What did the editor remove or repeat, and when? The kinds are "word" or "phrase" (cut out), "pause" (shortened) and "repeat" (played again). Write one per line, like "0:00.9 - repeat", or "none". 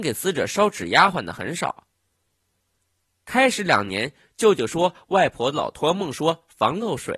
none